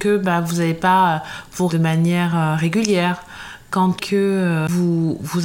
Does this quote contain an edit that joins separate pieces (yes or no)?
yes